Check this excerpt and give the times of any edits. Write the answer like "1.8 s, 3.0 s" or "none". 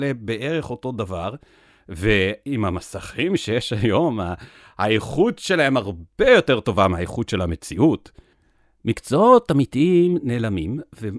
none